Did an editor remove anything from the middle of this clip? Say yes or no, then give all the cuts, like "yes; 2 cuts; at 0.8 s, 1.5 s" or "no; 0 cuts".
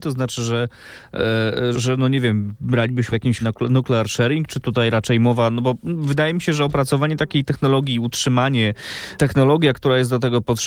yes; 4 cuts; at 1.7 s, 3.1 s, 3.4 s, 9.2 s